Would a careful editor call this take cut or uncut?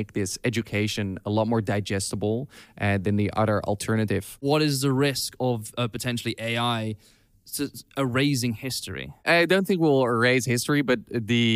uncut